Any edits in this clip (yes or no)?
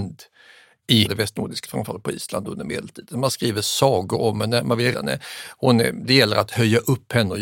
yes